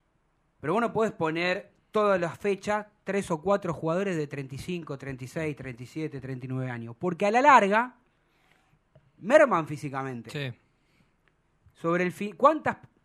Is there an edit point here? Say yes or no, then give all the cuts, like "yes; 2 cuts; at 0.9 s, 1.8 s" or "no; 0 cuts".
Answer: no; 0 cuts